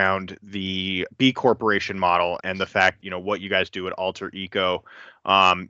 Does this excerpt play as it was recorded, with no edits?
no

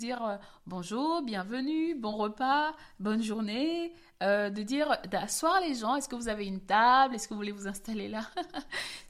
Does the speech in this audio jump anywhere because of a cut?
no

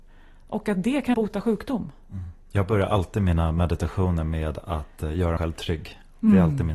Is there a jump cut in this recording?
yes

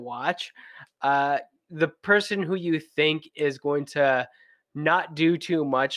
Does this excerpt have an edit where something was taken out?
no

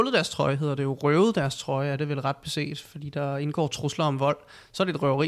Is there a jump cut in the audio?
no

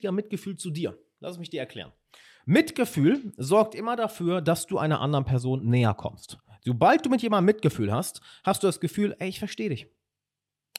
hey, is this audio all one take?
yes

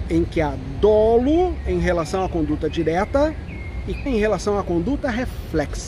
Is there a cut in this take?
yes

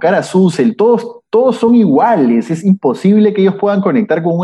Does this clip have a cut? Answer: no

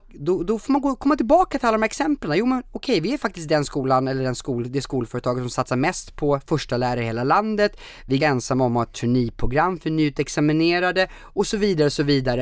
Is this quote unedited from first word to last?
no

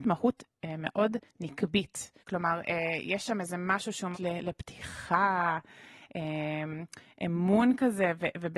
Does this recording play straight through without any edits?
no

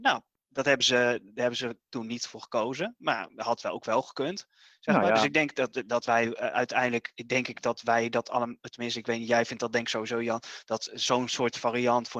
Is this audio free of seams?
yes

